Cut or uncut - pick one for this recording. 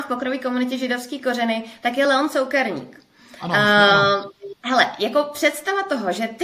uncut